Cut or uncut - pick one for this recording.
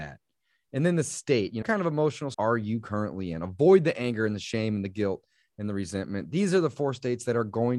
cut